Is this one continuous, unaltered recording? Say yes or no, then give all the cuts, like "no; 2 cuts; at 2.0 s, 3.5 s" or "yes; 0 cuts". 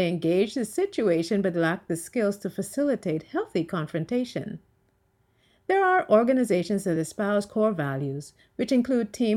yes; 0 cuts